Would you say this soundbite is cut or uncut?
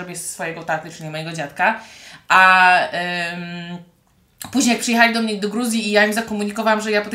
uncut